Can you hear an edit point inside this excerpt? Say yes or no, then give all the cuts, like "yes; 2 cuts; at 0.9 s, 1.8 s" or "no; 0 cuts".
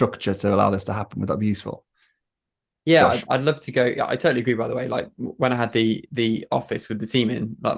no; 0 cuts